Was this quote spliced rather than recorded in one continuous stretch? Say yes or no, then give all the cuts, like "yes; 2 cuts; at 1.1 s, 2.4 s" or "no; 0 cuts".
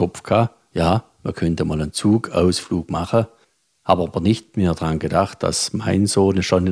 no; 0 cuts